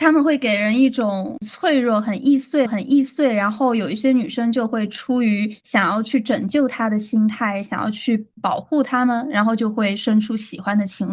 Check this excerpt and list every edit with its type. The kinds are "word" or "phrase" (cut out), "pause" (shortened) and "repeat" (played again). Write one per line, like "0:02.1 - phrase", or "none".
0:02.7 - repeat